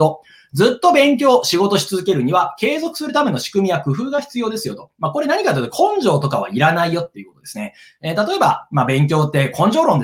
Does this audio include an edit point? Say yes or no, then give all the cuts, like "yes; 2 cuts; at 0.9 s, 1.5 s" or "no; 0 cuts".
no; 0 cuts